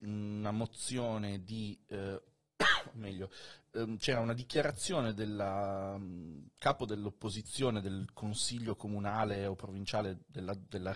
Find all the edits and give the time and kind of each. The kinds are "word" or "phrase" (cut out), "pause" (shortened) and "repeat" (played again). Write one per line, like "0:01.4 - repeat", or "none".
none

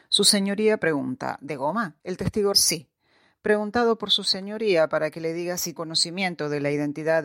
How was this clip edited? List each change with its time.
0:02.0 - pause
0:02.5 - word
0:05.8 - word

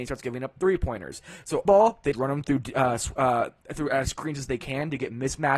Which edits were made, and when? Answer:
0:01.7 - word
0:02.1 - word
0:04.1 - word

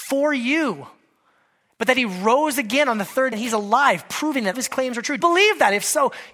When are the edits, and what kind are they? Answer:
0:03.3 - word
0:04.5 - word
0:05.2 - word

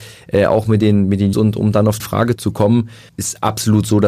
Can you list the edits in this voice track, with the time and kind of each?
0:01.3 - word
0:02.0 - word
0:02.3 - word
0:03.1 - word

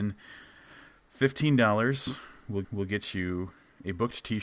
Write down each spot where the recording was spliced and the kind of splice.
0:02.6 - repeat

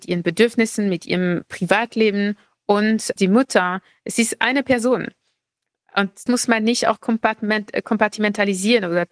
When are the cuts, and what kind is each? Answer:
0:03.2 - word
0:06.3 - word

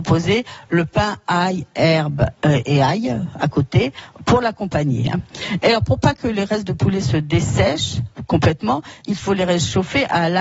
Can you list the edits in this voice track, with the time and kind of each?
0:02.4 - pause

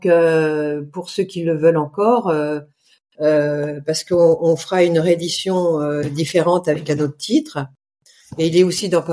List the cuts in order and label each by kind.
none

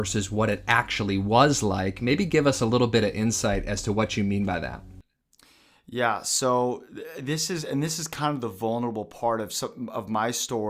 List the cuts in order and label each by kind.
none

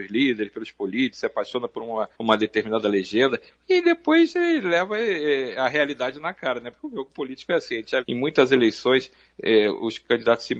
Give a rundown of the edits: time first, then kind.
0:02.1 - pause
0:08.0 - word

